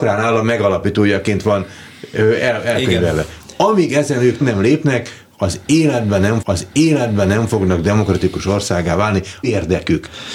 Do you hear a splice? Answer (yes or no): yes